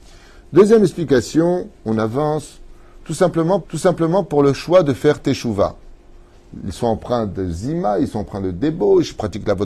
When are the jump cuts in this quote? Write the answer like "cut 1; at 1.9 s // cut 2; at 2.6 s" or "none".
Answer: cut 1; at 1.8 s // cut 2; at 3.6 s